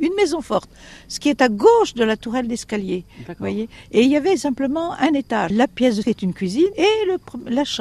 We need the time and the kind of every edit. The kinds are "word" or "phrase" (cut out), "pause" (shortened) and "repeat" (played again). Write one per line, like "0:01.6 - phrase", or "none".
0:06.0 - word